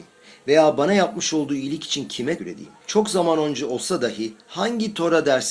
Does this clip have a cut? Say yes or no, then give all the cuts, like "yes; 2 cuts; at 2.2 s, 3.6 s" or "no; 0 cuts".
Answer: yes; 2 cuts; at 2.4 s, 2.8 s